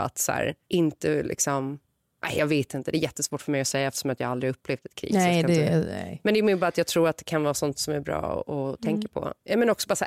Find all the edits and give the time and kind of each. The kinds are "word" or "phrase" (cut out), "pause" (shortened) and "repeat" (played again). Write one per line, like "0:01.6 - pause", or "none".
none